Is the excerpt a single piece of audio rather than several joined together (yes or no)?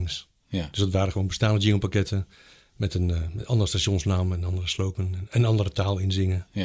yes